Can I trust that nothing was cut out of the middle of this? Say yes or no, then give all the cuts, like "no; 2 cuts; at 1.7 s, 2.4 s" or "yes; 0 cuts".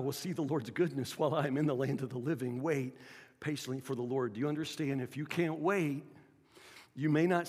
yes; 0 cuts